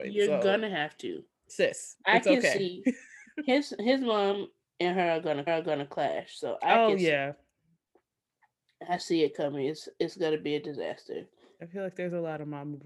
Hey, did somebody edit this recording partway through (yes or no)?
yes